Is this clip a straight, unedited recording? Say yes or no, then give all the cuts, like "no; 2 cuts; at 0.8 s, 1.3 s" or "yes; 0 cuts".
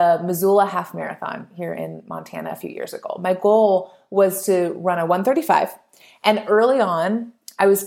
yes; 0 cuts